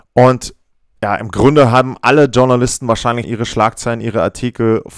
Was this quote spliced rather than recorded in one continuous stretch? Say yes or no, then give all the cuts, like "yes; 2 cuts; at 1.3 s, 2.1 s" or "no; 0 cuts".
yes; 1 cut; at 3.2 s